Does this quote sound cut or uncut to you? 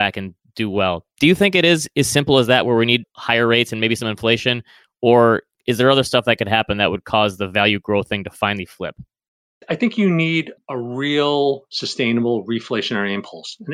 uncut